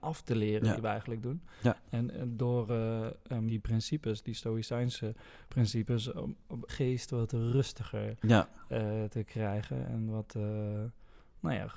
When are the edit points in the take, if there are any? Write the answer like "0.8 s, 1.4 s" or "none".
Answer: 3.5 s, 6.7 s